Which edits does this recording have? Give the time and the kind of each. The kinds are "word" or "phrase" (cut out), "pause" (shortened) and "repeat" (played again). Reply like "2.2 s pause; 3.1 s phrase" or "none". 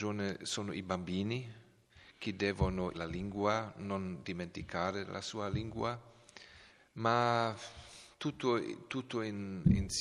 2.9 s word; 6.7 s pause